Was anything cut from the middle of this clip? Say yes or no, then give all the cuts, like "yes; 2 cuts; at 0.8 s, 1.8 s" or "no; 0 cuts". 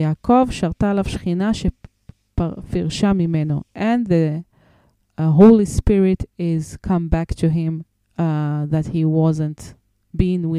no; 0 cuts